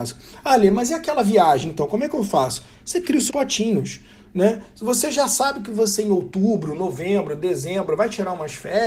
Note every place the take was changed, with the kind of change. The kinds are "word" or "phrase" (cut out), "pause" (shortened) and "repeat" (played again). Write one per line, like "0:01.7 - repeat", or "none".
0:03.3 - word